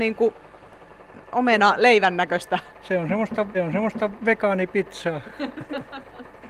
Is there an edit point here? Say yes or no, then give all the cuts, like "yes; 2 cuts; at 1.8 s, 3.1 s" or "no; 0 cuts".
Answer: yes; 2 cuts; at 2.7 s, 3.5 s